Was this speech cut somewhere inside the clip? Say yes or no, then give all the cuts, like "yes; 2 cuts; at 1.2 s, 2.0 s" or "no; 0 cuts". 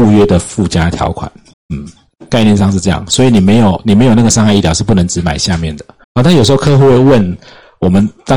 yes; 2 cuts; at 1.5 s, 6.0 s